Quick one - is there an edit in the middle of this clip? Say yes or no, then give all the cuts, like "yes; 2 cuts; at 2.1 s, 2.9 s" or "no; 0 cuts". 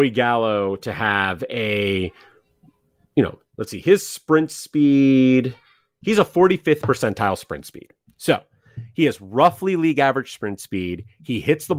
no; 0 cuts